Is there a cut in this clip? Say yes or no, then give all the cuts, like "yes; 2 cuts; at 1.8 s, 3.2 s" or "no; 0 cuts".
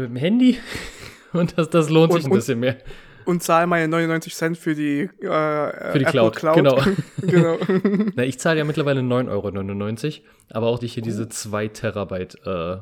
yes; 2 cuts; at 2.2 s, 10.8 s